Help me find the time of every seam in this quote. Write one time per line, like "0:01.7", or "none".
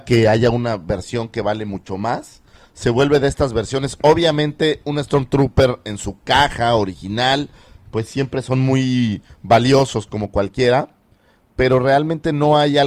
none